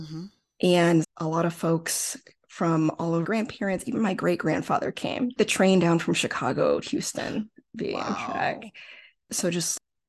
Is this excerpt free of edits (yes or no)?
no